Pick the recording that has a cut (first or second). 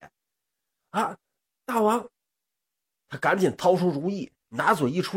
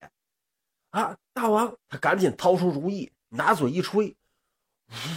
second